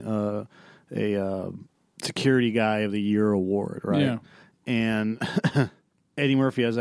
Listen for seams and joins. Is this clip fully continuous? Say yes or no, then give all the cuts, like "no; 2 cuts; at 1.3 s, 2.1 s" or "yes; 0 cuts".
yes; 0 cuts